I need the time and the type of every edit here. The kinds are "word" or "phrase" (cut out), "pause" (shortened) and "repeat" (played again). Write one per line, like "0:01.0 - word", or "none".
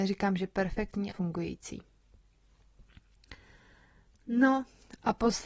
0:01.1 - word